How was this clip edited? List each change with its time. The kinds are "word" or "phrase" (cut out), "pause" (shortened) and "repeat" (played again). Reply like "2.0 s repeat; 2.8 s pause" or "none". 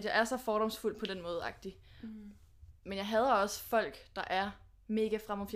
none